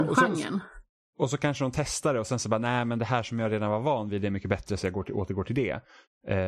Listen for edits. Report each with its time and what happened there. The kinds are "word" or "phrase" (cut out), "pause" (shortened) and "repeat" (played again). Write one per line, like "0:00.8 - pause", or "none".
none